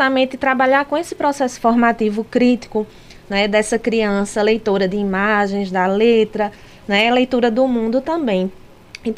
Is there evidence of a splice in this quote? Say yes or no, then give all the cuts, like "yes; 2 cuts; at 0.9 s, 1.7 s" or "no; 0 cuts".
no; 0 cuts